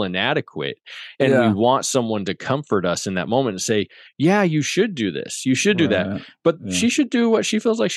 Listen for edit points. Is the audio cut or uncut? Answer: uncut